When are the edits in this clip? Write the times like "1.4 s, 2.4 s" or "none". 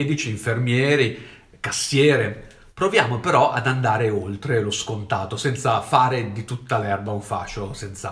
none